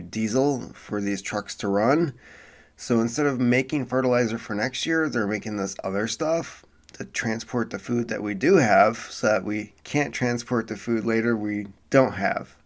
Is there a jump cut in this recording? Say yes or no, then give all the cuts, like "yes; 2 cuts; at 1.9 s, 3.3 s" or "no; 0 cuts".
no; 0 cuts